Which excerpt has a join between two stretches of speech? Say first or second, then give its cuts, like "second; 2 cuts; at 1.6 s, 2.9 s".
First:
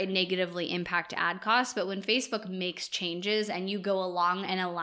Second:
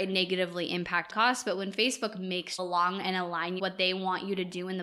second; 3 cuts; at 1.1 s, 2.6 s, 3.6 s